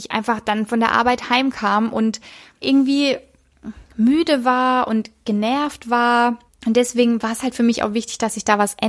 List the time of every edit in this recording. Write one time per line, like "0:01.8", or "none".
0:02.6
0:06.5